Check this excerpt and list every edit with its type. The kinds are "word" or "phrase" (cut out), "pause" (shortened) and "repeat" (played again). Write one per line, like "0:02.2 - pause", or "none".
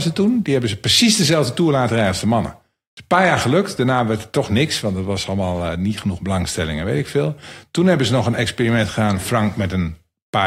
none